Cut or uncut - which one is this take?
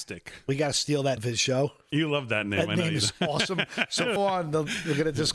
cut